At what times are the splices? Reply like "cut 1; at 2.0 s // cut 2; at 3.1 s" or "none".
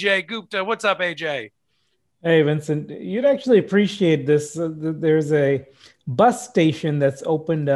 none